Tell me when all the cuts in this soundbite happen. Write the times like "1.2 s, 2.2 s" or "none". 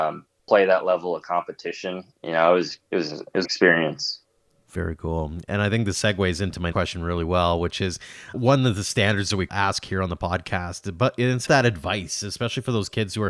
3.4 s, 6.7 s, 8.3 s, 11.5 s